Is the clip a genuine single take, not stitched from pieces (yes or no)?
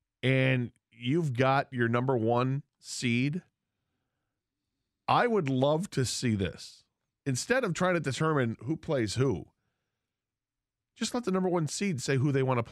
yes